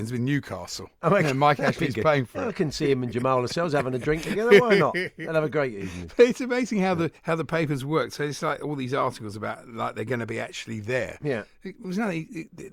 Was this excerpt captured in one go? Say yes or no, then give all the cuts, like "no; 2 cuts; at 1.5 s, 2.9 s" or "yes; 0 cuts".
no; 1 cut; at 7.2 s